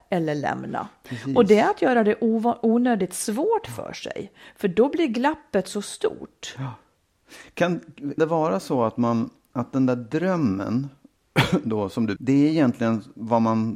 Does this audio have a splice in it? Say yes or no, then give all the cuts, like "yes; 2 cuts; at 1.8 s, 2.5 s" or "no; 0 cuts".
yes; 2 cuts; at 8.2 s, 12.2 s